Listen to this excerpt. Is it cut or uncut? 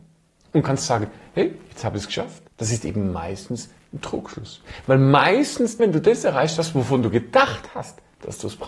cut